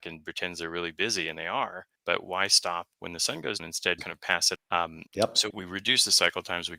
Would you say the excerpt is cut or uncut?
cut